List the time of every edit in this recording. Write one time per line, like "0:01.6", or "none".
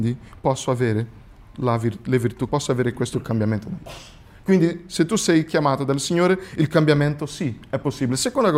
0:02.5
0:03.8